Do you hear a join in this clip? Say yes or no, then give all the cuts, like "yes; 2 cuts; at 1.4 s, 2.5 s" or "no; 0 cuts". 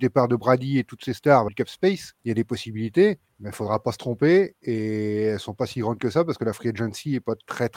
yes; 3 cuts; at 1.5 s, 2.2 s, 3.3 s